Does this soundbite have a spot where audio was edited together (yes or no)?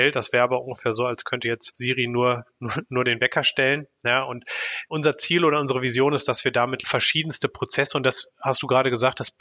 no